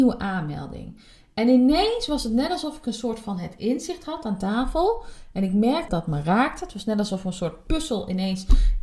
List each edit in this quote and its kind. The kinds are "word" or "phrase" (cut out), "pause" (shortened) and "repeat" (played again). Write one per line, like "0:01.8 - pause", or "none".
0:05.9 - word